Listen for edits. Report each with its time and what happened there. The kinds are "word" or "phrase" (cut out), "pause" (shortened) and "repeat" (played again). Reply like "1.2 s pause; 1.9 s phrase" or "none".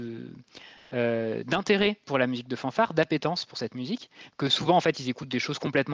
none